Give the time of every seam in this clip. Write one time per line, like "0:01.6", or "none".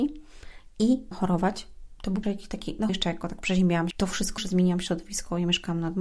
0:01.1
0:02.2
0:02.9
0:03.9
0:04.4